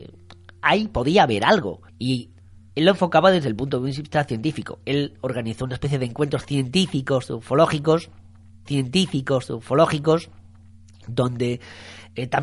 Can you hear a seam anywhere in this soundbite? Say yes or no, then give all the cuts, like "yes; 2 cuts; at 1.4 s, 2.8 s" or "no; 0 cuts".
yes; 2 cuts; at 1.9 s, 8.7 s